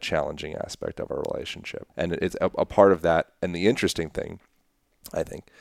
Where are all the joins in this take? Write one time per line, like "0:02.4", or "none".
0:01.9